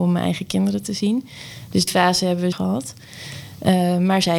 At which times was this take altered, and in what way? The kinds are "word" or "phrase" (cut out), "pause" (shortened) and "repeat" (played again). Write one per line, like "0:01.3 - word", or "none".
0:01.9 - word
0:02.5 - word